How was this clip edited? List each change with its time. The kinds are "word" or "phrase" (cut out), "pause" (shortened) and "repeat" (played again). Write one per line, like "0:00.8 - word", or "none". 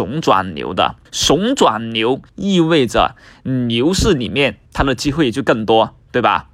0:01.1 - pause
0:02.3 - pause
0:04.7 - pause